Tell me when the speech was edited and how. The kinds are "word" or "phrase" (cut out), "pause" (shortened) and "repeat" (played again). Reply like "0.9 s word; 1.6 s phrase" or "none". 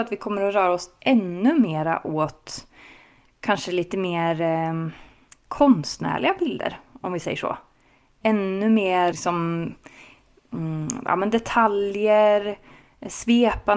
9.1 s word

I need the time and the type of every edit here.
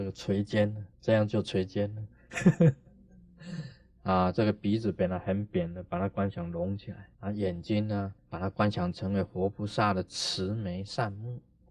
0.9 s pause; 7.1 s pause; 8.2 s pause

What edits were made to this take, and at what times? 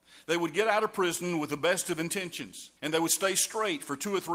2.8 s pause

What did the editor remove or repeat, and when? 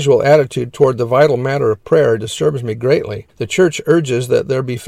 3.3 s pause

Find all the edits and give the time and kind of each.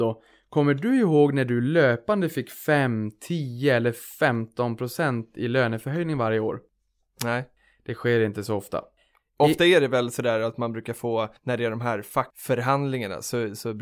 11.4 s pause

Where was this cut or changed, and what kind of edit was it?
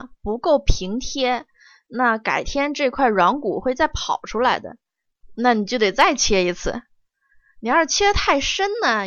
none

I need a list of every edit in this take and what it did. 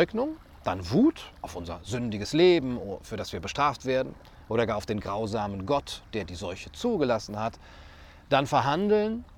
none

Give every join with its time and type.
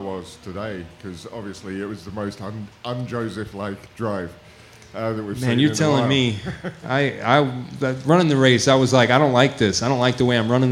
none

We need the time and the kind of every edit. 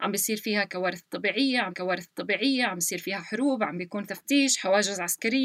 1.7 s repeat; 4.1 s phrase

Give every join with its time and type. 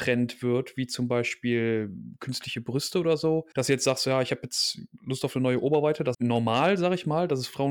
3.5 s pause; 6.1 s phrase

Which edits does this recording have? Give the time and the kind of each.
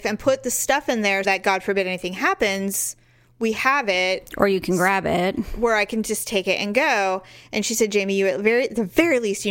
1.2 s word

